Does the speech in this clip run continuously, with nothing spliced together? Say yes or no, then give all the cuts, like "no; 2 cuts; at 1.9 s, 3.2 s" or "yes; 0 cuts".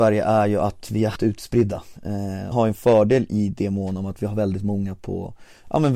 no; 2 cuts; at 1.2 s, 2.5 s